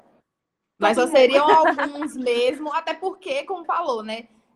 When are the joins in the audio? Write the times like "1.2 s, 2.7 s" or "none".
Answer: 3.6 s